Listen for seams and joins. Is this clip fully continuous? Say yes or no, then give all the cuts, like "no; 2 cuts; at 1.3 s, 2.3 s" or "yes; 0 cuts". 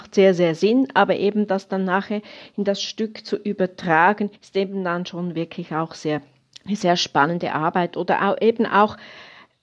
no; 2 cuts; at 4.4 s, 6.5 s